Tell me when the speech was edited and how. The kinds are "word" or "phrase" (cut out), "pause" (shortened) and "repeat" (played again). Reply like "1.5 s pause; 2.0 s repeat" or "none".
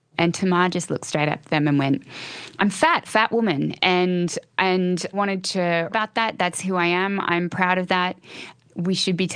3.0 s phrase; 5.1 s word; 5.9 s word